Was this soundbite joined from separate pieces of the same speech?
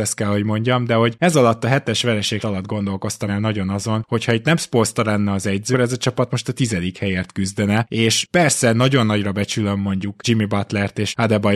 yes; 3 cuts; at 2.4 s, 3.3 s, 5.7 s

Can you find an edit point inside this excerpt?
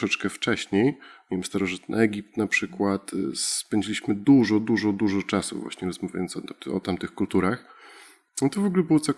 no; 0 cuts

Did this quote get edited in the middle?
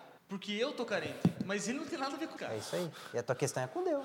yes; 1 cut; at 2.4 s

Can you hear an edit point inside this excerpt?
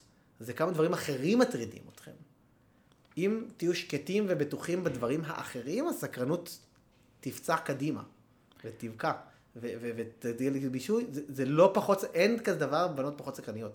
no; 0 cuts

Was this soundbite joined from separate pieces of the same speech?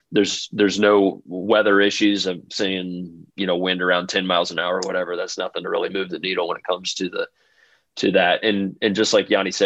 no; 0 cuts

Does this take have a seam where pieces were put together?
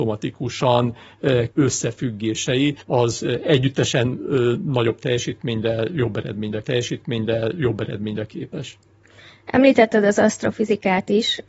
yes; 3 cuts; at 1.5 s, 2.8 s, 6.6 s

